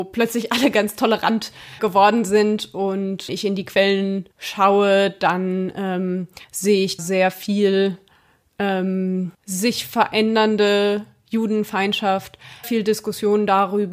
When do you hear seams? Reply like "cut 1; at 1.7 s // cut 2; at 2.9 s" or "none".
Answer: cut 1; at 1.8 s // cut 2; at 3.3 s // cut 3; at 4.3 s // cut 4; at 6.4 s // cut 5; at 7.0 s // cut 6; at 9.3 s // cut 7; at 12.6 s